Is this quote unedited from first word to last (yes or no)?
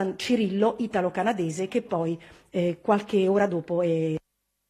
yes